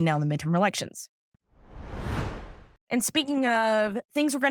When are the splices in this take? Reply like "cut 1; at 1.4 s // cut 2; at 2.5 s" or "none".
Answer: none